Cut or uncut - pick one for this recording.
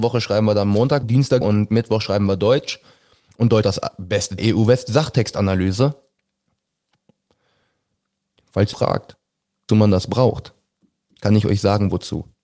cut